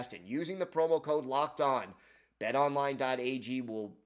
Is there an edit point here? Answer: no; 0 cuts

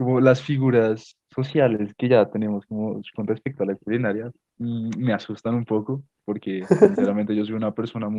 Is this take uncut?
yes; 0 cuts

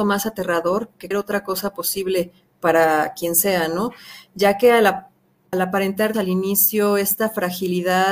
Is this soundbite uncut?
no; 3 cuts; at 1.1 s, 5.5 s, 6.1 s

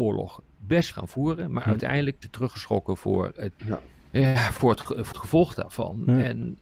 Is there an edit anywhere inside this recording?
yes; 4 cuts; at 0.9 s, 2.2 s, 3.6 s, 5.1 s

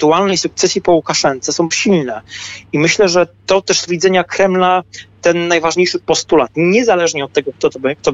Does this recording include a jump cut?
yes; 3 cuts; at 1.7 s, 3.9 s, 5.2 s

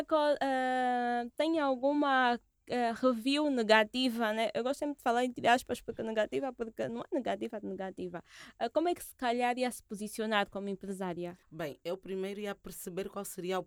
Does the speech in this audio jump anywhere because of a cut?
yes; 1 cut; at 11.4 s

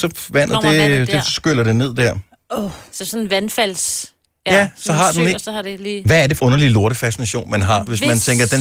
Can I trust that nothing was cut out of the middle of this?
no; 1 cut; at 6.4 s

